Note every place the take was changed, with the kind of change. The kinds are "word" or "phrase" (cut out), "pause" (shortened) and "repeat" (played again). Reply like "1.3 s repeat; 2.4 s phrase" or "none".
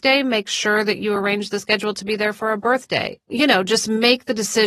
none